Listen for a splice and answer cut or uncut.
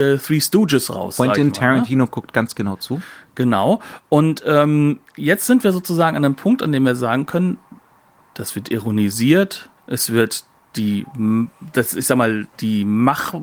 cut